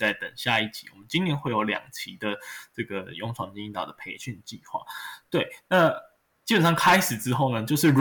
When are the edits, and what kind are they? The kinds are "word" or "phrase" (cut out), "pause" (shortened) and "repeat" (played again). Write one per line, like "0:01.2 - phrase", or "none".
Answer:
none